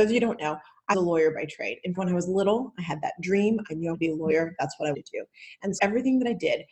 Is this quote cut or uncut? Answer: cut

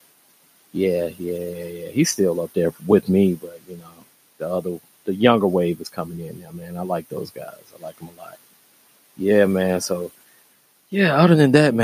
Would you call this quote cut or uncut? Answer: uncut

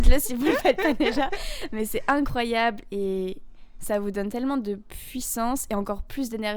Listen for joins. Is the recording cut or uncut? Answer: uncut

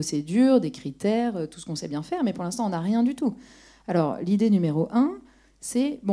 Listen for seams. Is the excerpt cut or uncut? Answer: uncut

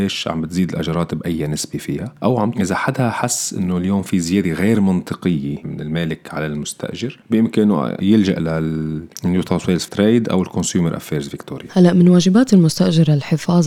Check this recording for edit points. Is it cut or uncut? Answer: cut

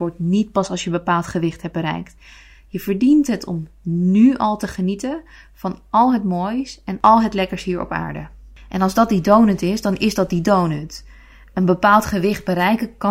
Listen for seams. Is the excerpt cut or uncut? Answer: uncut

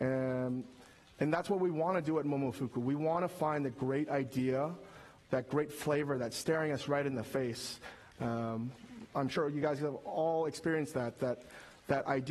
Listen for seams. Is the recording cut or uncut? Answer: uncut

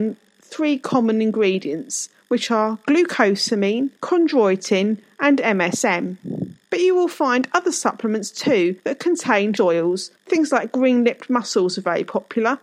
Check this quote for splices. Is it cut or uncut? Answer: cut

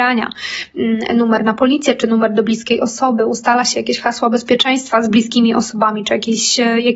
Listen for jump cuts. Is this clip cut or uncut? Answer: uncut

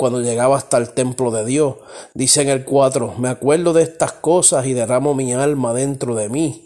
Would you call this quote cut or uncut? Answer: uncut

